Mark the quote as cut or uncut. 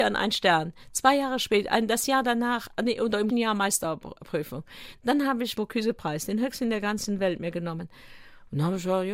cut